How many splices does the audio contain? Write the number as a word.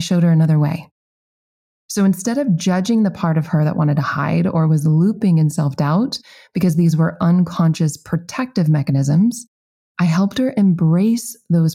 zero